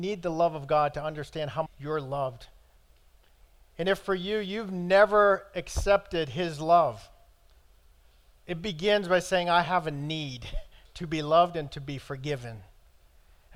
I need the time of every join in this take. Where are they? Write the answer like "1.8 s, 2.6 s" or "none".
1.7 s